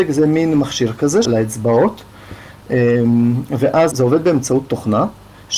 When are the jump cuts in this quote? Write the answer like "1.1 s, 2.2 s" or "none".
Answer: 1.2 s, 3.9 s